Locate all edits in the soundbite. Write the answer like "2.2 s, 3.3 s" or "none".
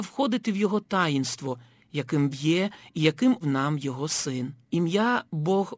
2.3 s, 3.4 s, 4.6 s